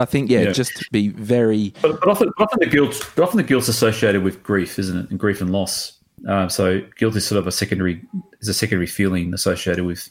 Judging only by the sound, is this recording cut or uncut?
uncut